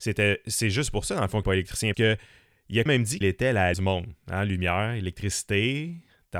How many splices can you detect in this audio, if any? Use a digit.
5